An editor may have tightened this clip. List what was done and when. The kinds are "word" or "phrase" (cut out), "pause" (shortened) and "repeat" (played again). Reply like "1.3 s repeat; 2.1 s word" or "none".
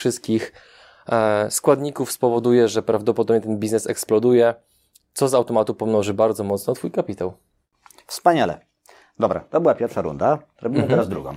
none

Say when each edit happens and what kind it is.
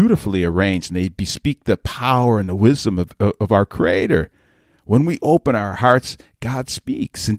none

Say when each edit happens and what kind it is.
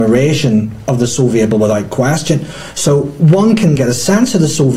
1.5 s word; 3.8 s word

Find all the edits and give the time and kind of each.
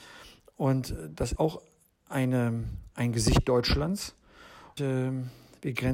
1.4 s word; 2.9 s pause; 4.8 s word

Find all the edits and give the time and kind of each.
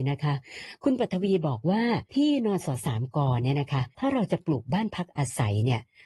2.1 s pause; 3.9 s pause

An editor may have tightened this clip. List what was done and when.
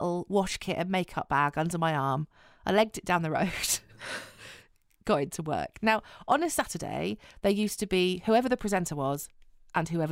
none

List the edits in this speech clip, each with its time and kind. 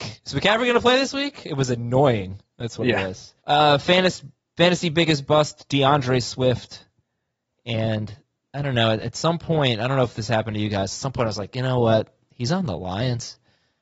3.4 s pause

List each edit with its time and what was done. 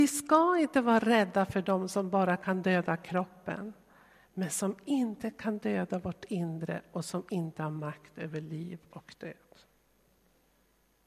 none

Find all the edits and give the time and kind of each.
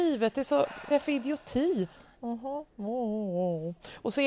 0.9 s phrase

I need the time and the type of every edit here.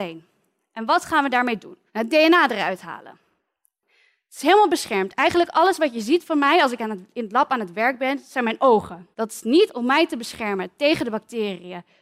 1.9 s pause; 9.1 s pause

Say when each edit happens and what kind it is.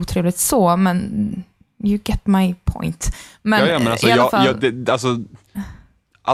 none

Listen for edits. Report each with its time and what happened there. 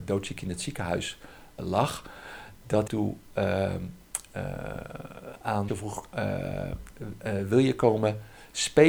1.6 s word; 2.9 s phrase; 5.7 s word

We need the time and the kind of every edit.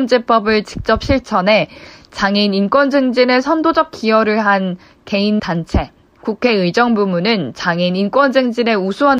5.4 s word

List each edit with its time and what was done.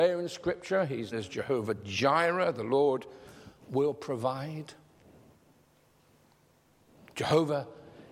1.1 s word

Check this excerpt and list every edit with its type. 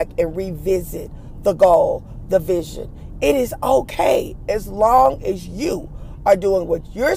none

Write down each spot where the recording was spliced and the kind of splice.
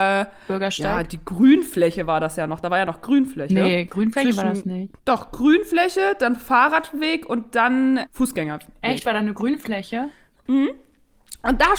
5.0 s pause; 8.1 s word

